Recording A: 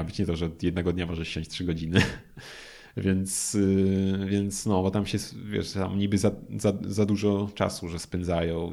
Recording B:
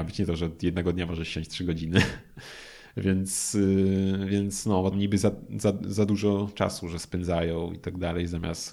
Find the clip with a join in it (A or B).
B